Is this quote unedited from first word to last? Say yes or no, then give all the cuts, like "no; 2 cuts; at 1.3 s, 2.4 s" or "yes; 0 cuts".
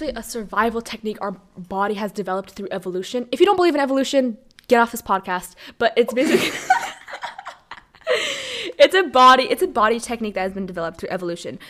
yes; 0 cuts